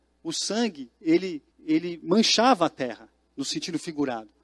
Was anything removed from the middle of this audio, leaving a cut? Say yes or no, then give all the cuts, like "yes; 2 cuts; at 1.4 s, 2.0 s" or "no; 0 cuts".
yes; 1 cut; at 1.5 s